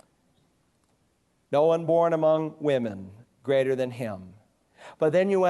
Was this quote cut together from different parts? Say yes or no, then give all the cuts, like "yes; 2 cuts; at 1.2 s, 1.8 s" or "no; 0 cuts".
no; 0 cuts